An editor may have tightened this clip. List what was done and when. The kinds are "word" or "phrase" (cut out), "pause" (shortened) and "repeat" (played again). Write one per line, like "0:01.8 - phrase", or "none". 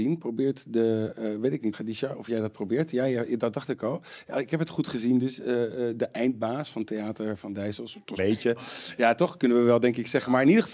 0:01.7 - word
0:08.2 - phrase

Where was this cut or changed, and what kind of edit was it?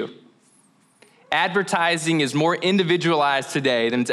none

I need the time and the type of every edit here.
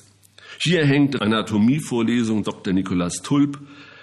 0:01.2 - word
0:02.4 - word

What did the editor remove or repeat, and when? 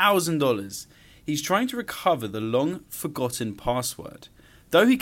none

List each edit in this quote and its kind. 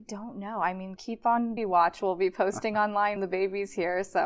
0:01.0 - word
0:01.6 - word
0:03.2 - word

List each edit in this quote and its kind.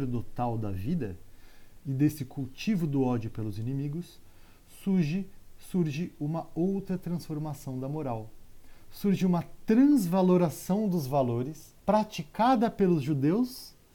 0:11.8 - pause

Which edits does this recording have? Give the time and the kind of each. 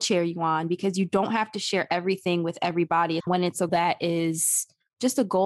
0:03.2 - word
0:03.7 - word

